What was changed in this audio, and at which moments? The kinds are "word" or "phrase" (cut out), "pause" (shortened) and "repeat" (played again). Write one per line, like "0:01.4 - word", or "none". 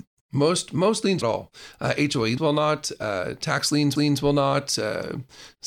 0:01.2 - phrase
0:02.4 - word
0:04.0 - repeat